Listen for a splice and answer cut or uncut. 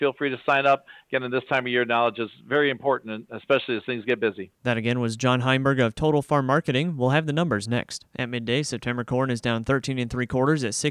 cut